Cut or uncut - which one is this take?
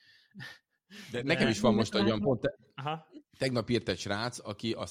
uncut